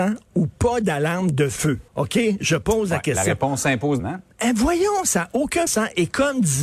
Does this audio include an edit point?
yes; 3 cuts; at 1.9 s, 4.0 s, 5.7 s

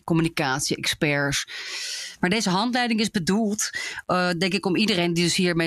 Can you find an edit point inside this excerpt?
no; 0 cuts

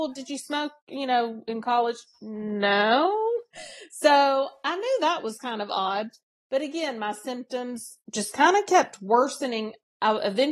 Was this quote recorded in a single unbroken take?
yes; 0 cuts

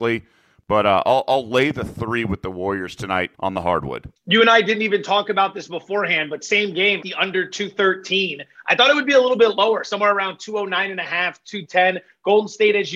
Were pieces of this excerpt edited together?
yes; 3 cuts; at 3.3 s, 4.2 s, 7.0 s

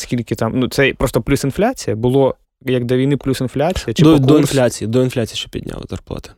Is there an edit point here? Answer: yes; 1 cut; at 2.4 s

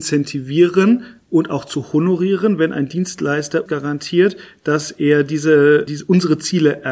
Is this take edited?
yes; 2 cuts; at 3.7 s, 5.9 s

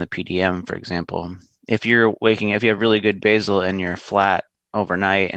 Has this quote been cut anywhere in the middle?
no; 0 cuts

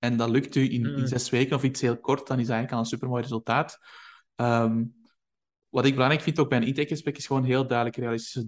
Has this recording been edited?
no; 0 cuts

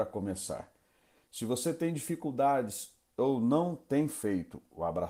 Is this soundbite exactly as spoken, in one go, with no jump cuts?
yes; 0 cuts

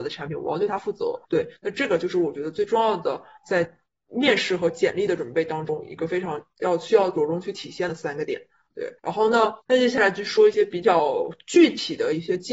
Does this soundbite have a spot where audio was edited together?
yes; 3 cuts; at 1.2 s, 9.0 s, 9.6 s

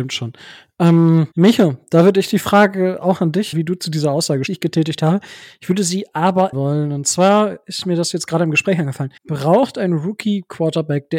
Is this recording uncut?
no; 5 cuts; at 1.3 s, 3.5 s, 4.5 s, 6.5 s, 9.2 s

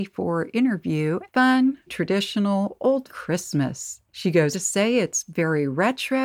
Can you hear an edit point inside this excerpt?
yes; 4 cuts; at 1.3 s, 1.9 s, 3.1 s, 4.5 s

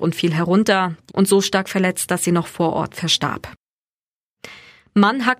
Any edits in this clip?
yes; 1 cut; at 1.1 s

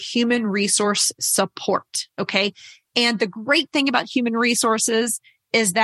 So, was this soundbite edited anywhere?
yes; 1 cut; at 2.1 s

